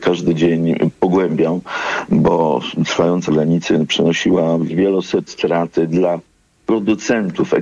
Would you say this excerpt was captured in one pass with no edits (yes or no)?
no